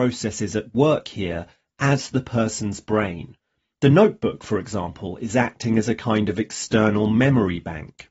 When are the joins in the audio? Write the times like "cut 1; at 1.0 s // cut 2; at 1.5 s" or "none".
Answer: none